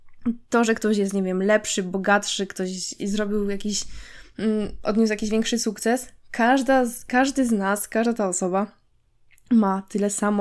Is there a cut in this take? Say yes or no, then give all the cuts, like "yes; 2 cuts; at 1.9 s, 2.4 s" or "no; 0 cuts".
no; 0 cuts